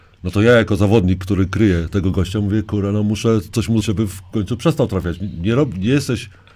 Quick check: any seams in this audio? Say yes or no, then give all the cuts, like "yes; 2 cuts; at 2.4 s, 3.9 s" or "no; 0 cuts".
yes; 1 cut; at 3.8 s